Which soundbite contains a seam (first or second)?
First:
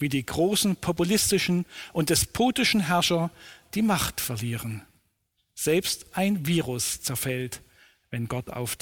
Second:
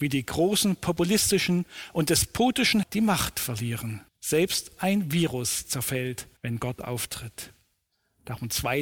second